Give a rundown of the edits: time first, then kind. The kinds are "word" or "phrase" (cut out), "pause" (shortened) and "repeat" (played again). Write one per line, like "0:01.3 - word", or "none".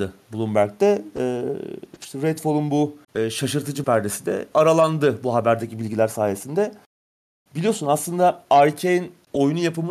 0:03.0 - pause
0:03.8 - phrase
0:04.5 - word